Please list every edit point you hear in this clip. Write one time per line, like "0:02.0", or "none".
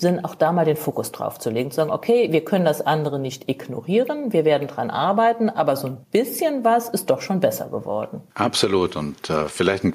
0:06.0
0:08.3